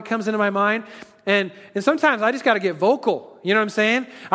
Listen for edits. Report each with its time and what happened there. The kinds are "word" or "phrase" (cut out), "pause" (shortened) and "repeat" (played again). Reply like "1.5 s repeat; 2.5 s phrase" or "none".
none